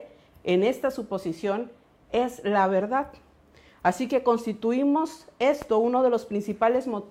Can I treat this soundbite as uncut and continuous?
yes; 0 cuts

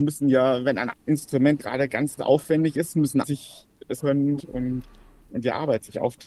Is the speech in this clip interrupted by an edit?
yes; 7 cuts; at 0.9 s, 1.6 s, 2.2 s, 3.2 s, 4.0 s, 4.4 s, 5.3 s

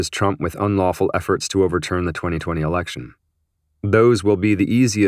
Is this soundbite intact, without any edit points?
yes; 0 cuts

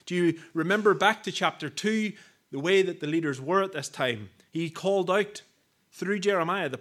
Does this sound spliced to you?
no; 0 cuts

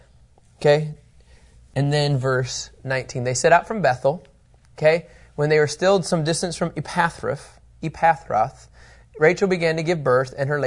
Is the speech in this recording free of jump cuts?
yes; 0 cuts

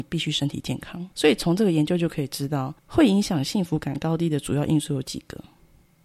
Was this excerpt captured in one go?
no; 2 cuts; at 1.1 s, 2.8 s

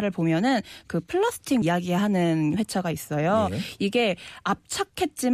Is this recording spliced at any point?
yes; 1 cut; at 1.6 s

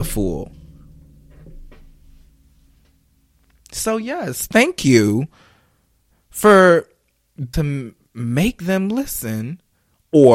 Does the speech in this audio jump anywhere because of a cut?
yes; 1 cut; at 7.5 s

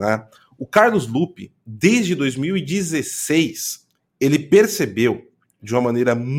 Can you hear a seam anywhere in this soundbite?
no; 0 cuts

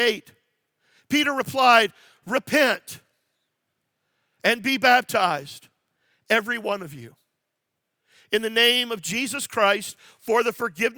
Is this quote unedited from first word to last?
yes; 0 cuts

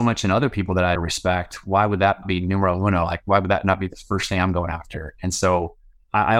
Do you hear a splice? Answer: yes; 2 cuts; at 1.0 s, 2.2 s

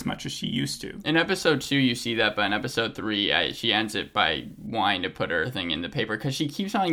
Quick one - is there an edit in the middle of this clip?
no; 0 cuts

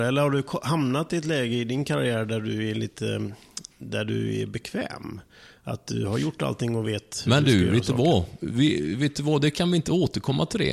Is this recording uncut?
yes; 0 cuts

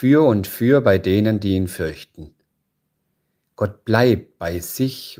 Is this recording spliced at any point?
no; 0 cuts

